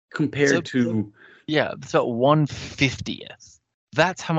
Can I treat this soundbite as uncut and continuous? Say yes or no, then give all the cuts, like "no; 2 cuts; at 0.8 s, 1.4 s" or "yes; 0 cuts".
yes; 0 cuts